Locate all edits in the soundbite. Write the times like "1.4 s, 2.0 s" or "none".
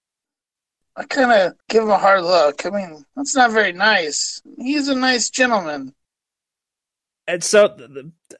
1.6 s